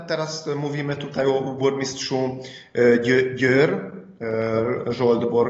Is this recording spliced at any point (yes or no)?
no